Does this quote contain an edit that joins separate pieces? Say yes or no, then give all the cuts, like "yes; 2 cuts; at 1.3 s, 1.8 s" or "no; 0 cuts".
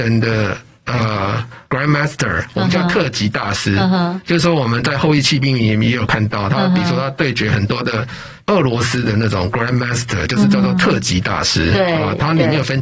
yes; 2 cuts; at 1.6 s, 8.4 s